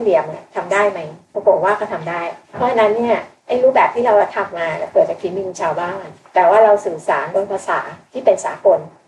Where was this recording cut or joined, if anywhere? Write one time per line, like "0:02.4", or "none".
0:01.2
0:02.4